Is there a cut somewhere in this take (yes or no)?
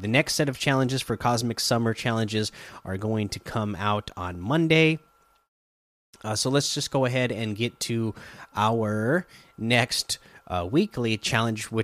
no